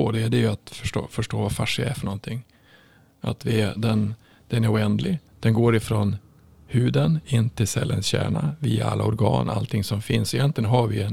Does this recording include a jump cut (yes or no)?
yes